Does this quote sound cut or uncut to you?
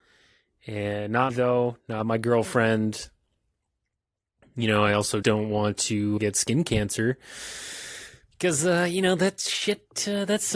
cut